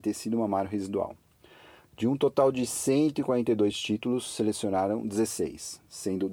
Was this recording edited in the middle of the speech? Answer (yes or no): no